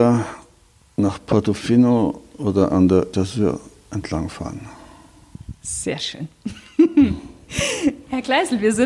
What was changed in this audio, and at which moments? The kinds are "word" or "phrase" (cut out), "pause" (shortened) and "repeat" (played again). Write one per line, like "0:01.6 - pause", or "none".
0:03.1 - word